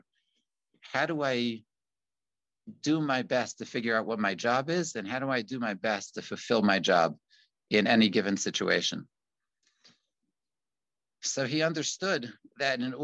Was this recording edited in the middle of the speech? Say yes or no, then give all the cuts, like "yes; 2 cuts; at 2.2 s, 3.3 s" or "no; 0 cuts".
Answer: no; 0 cuts